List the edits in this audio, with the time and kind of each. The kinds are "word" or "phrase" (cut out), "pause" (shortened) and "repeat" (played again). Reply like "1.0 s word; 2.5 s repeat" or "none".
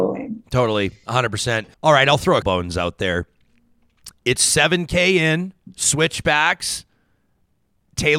1.7 s pause; 2.4 s word

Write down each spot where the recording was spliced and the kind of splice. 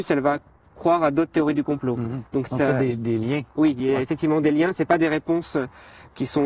2.5 s word; 3.8 s word

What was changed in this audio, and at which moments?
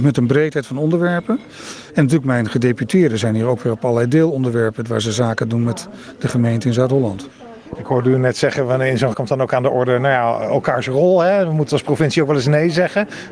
9.1 s word

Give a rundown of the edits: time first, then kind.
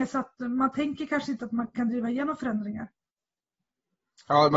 none

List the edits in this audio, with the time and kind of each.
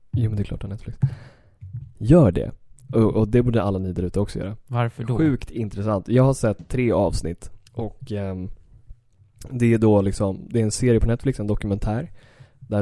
7.7 s pause

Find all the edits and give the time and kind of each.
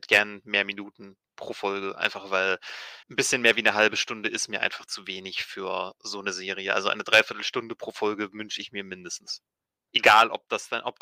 3.0 s pause

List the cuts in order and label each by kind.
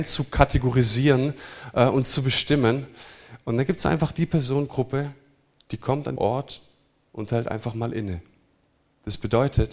6.2 s word

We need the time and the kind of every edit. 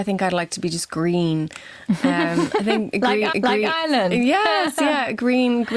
3.3 s repeat

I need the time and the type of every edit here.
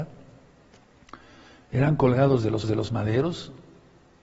2.6 s repeat

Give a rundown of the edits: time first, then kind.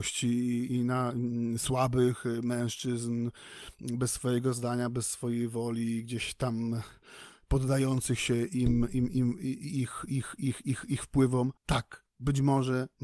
11.6 s pause

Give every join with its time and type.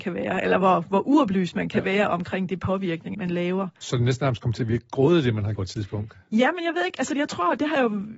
3.1 s word; 5.5 s word

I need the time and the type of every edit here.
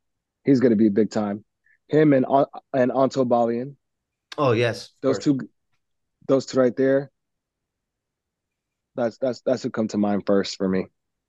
6.5 s word

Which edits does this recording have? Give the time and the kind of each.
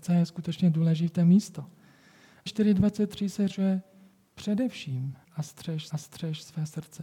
2.5 s phrase; 3.5 s word; 5.2 s phrase; 5.9 s repeat

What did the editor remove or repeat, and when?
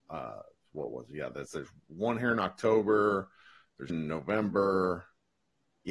1.5 s word; 3.9 s word

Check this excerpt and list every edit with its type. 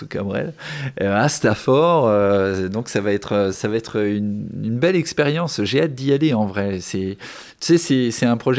3.5 s word

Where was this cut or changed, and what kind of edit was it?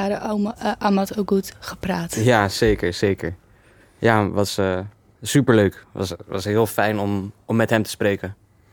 none

